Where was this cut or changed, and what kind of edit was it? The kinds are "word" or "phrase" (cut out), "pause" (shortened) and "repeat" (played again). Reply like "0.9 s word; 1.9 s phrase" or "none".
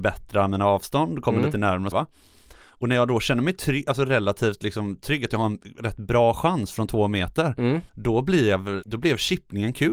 1.9 s word; 7.9 s pause; 8.8 s word

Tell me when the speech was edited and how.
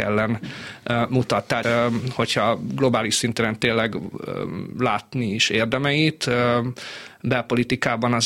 1.6 s phrase

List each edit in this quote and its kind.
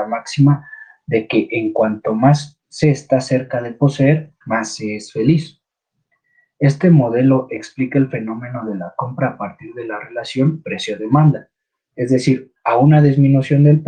2.6 s pause; 4.4 s pause

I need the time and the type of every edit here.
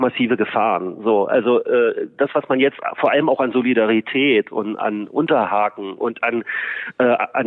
none

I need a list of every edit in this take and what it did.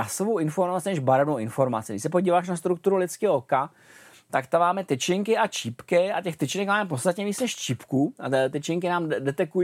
none

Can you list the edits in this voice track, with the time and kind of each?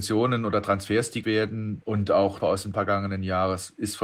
1.2 s word; 2.4 s phrase; 2.7 s word

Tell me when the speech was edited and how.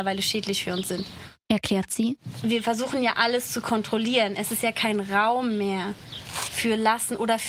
none

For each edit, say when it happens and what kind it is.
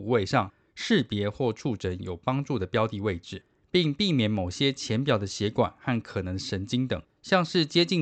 none

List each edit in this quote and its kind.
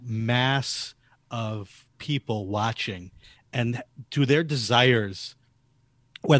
none

